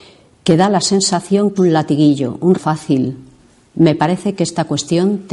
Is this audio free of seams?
no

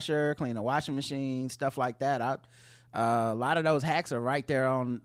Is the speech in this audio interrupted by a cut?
no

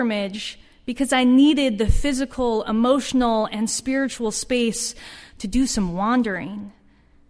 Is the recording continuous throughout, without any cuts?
yes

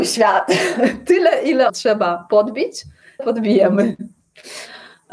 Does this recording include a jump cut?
yes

